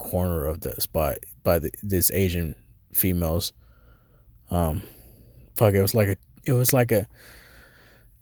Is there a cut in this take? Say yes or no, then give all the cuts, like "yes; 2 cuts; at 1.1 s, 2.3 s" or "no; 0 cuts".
no; 0 cuts